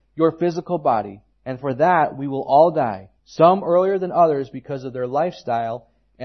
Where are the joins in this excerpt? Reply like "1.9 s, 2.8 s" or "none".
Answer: 1.3 s, 3.2 s